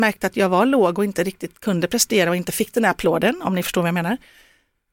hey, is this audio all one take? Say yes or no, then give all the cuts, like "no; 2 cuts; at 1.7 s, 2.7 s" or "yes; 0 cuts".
yes; 0 cuts